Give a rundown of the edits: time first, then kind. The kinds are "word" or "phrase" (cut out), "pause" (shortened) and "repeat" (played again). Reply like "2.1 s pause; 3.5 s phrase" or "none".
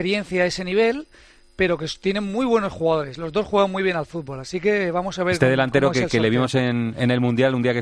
none